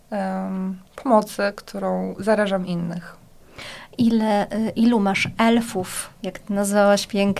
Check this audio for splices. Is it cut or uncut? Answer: uncut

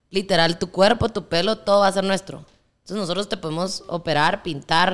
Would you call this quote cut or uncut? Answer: uncut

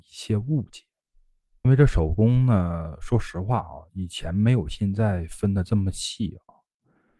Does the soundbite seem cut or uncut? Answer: uncut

